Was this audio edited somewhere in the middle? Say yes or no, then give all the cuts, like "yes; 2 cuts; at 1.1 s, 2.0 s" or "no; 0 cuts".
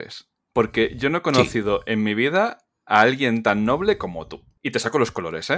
no; 0 cuts